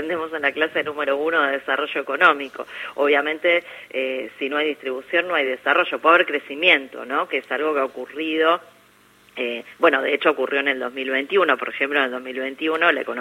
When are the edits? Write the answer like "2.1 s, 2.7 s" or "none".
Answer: none